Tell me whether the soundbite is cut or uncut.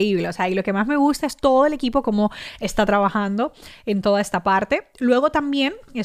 uncut